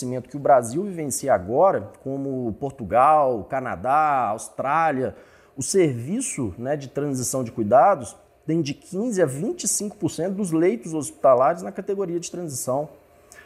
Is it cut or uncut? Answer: uncut